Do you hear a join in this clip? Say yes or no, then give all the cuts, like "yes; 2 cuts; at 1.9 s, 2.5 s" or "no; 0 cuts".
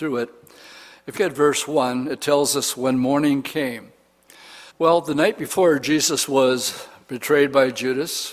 yes; 2 cuts; at 1.2 s, 4.7 s